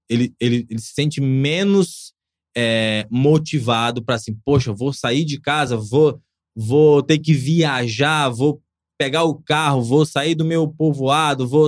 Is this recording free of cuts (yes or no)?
yes